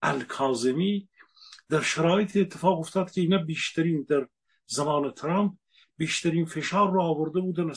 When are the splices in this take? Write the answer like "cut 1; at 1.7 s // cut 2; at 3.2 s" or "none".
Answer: none